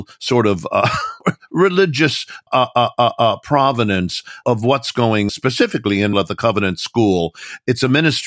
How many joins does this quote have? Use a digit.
4